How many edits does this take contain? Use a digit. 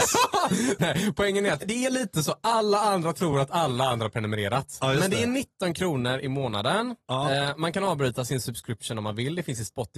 0